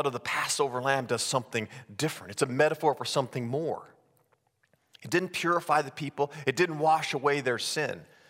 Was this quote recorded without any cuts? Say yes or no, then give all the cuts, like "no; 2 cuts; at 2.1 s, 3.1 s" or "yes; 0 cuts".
yes; 0 cuts